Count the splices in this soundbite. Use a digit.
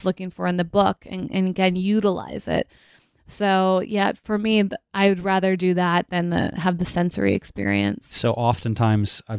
0